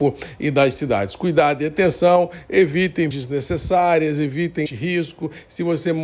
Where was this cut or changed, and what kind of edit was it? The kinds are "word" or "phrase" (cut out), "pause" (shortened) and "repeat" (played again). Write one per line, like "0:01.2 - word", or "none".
0:03.1 - word
0:04.7 - word